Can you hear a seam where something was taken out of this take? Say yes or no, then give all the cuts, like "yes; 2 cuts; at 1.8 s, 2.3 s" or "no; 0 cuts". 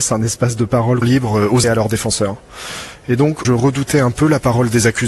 yes; 3 cuts; at 1.0 s, 1.6 s, 3.4 s